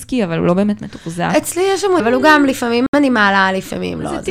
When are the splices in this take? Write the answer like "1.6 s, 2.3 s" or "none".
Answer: 2.0 s